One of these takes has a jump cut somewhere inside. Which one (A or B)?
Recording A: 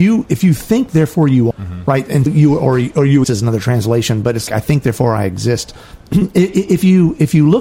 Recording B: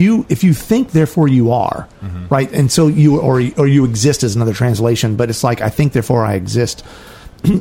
A